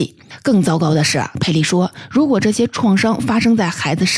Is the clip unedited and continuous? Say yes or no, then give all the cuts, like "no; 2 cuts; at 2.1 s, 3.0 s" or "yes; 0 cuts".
yes; 0 cuts